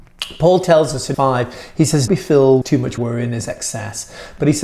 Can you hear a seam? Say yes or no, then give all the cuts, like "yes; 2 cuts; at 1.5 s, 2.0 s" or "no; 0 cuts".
yes; 4 cuts; at 1.1 s, 2.1 s, 2.6 s, 3.0 s